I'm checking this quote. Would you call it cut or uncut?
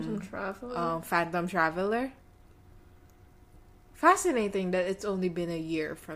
uncut